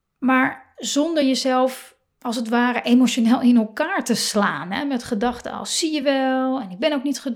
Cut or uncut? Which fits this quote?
uncut